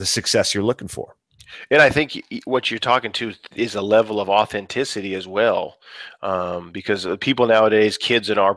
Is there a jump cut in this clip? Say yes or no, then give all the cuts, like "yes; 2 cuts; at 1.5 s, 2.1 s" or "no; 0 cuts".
no; 0 cuts